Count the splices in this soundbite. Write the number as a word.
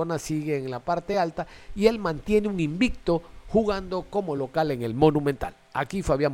zero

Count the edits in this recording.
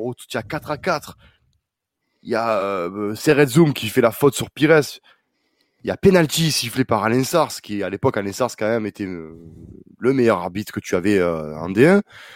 zero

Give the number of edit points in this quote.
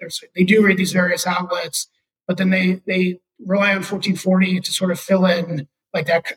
zero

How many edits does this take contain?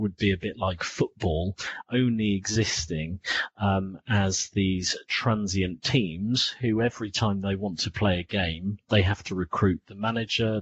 zero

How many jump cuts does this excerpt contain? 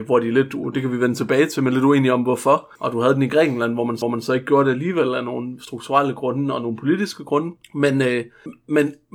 three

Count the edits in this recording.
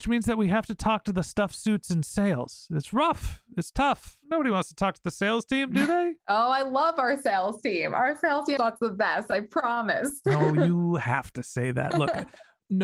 two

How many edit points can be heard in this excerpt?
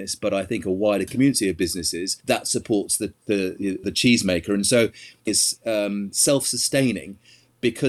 three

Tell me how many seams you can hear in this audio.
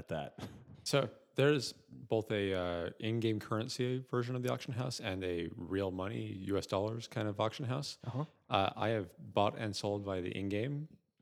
zero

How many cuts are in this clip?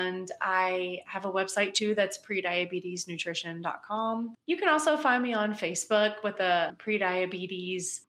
zero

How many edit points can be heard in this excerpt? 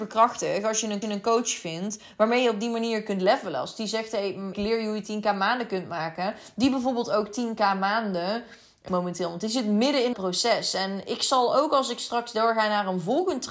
four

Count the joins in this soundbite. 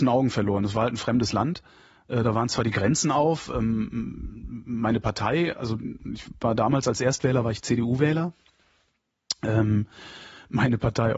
zero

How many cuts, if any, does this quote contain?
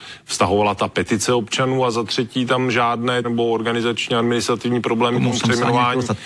one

